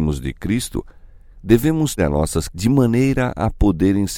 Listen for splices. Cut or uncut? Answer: cut